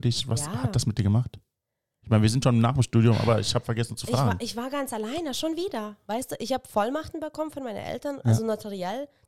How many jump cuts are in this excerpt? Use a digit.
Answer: 0